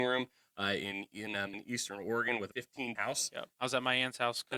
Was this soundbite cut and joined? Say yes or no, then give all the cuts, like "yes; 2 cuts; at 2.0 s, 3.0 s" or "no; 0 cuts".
yes; 4 cuts; at 1.5 s, 2.5 s, 3.0 s, 3.5 s